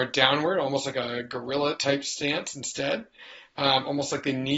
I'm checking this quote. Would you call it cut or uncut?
uncut